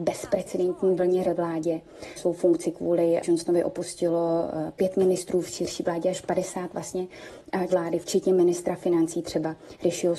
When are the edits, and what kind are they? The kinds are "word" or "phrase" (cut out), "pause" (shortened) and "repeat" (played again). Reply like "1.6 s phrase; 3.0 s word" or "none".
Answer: 1.2 s word; 7.7 s word